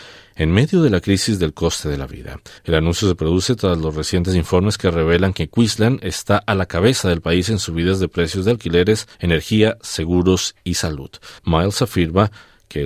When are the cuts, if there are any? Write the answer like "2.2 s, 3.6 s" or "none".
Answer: 2.6 s, 9.1 s, 11.4 s